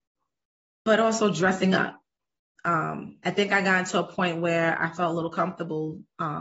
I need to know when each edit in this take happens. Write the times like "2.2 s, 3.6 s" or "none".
none